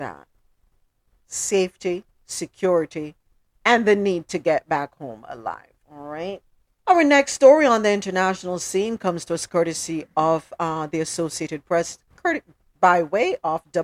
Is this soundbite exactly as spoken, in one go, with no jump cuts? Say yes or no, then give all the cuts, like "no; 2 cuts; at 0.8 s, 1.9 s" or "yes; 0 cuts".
no; 3 cuts; at 2.1 s, 5.8 s, 6.7 s